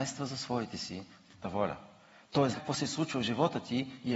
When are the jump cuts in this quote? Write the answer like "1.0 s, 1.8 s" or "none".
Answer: 1.4 s, 2.5 s